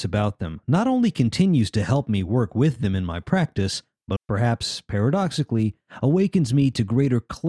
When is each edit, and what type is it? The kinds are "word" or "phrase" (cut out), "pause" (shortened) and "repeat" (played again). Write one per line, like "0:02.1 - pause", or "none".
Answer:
0:04.2 - word